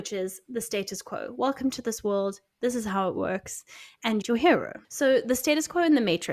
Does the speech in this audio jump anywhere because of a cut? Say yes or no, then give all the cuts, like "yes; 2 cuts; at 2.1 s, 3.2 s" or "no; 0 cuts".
yes; 2 cuts; at 4.2 s, 4.8 s